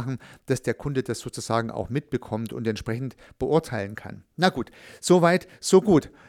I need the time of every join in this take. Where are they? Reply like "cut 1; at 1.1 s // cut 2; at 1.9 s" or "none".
cut 1; at 4.3 s